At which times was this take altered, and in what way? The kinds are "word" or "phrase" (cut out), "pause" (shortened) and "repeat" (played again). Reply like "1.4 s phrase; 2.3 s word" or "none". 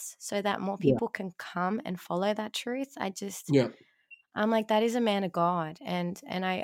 none